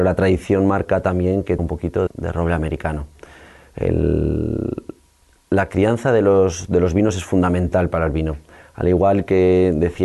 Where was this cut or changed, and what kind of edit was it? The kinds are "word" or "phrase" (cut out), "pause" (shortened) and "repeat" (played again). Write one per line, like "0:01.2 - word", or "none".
0:01.6 - word
0:02.1 - word
0:05.3 - pause

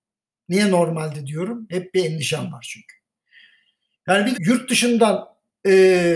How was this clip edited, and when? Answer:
0:04.3 - word

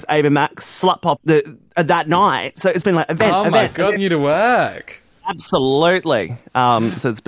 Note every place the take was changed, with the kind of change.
0:01.2 - word
0:02.8 - word
0:04.0 - phrase

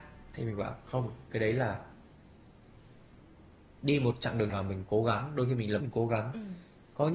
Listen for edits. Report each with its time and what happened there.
0:04.5 - word
0:05.8 - word

